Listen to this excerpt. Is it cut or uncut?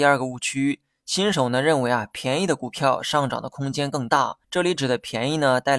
cut